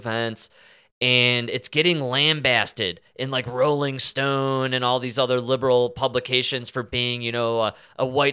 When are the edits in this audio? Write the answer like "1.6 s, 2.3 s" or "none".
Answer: none